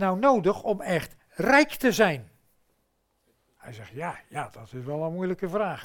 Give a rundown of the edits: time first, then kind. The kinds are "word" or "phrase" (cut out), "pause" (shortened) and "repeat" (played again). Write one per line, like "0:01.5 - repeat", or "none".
none

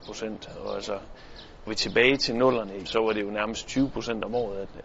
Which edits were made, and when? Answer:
0:01.7 - word
0:02.8 - word

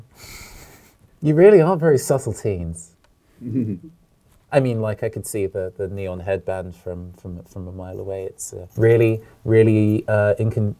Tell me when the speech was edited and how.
0:02.9 - pause
0:08.7 - pause

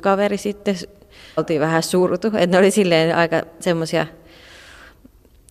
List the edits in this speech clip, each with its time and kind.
0:01.4 - word

